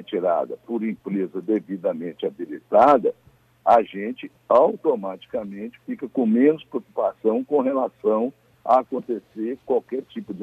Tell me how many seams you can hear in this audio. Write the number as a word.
zero